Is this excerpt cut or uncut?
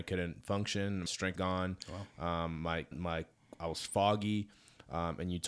cut